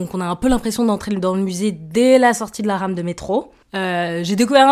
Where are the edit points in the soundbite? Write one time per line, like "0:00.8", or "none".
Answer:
0:03.6